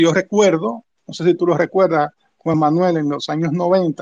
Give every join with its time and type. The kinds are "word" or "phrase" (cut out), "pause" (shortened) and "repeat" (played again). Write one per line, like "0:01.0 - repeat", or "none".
none